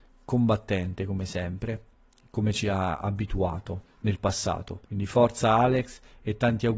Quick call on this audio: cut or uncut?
cut